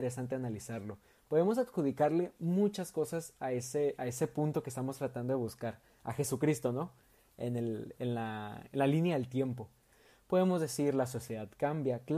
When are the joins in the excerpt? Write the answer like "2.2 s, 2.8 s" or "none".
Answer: none